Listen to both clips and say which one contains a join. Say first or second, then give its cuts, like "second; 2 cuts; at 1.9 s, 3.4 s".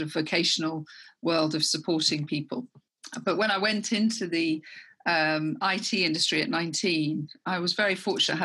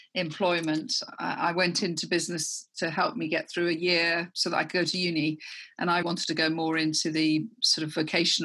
second; 2 cuts; at 2.7 s, 6.0 s